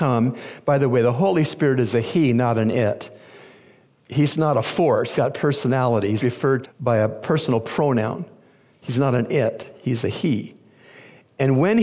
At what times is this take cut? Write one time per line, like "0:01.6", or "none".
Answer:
0:05.1
0:06.2
0:06.6